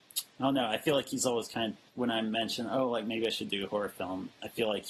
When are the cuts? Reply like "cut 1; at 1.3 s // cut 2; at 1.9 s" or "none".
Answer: cut 1; at 1.9 s